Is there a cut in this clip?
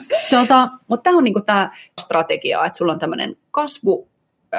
yes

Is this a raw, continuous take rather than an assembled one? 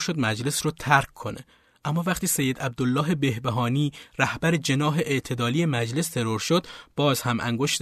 yes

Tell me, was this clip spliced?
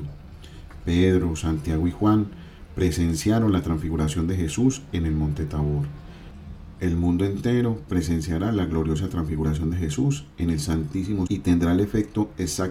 yes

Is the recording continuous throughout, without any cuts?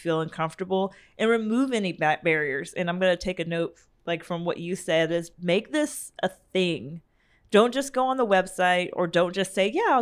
yes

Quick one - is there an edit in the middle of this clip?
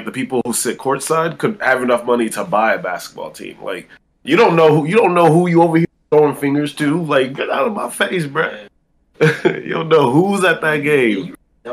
no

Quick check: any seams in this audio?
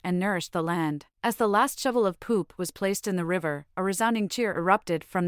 yes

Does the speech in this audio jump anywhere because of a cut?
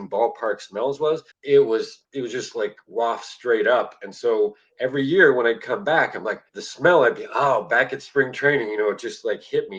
yes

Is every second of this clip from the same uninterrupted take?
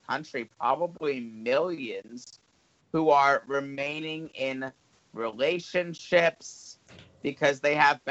yes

